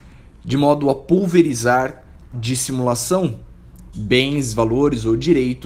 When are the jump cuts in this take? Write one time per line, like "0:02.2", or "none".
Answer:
0:02.3
0:03.9